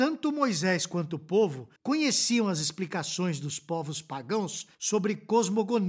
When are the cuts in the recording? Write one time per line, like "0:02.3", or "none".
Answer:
0:01.8
0:04.7